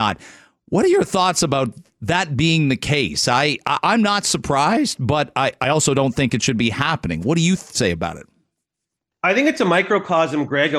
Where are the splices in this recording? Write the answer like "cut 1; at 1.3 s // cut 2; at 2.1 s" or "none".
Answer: none